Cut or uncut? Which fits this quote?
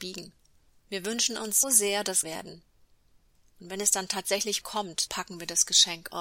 cut